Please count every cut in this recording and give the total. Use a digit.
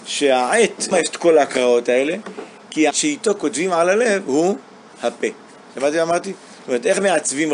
2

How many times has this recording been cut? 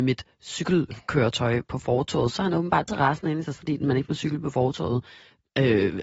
2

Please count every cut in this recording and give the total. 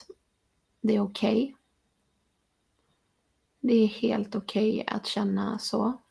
0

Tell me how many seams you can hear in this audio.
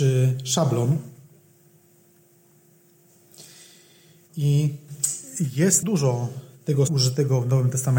2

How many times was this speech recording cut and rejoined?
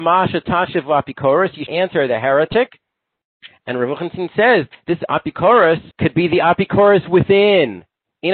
3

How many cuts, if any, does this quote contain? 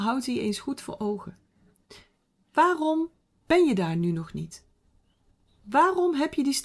0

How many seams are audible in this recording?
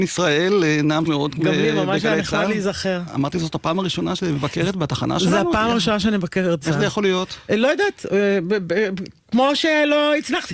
4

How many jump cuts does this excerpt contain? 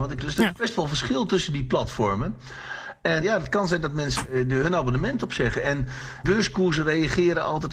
2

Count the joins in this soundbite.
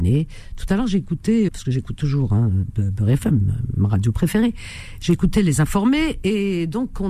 2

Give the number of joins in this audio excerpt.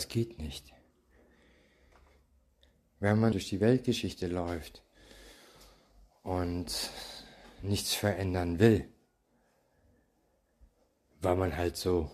1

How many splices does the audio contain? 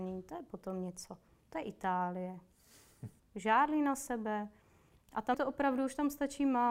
2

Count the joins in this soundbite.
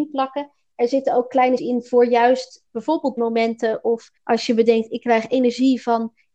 4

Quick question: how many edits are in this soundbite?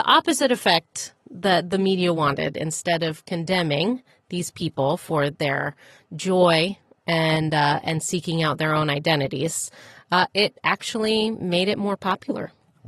0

